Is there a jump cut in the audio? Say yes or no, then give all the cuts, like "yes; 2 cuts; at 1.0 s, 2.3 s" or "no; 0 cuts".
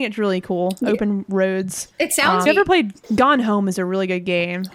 yes; 3 cuts; at 1.9 s, 2.5 s, 3.0 s